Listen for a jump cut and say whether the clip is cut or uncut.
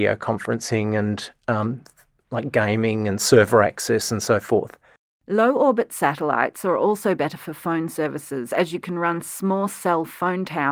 uncut